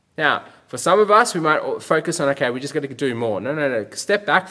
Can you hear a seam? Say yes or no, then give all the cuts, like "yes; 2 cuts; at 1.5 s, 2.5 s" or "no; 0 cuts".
no; 0 cuts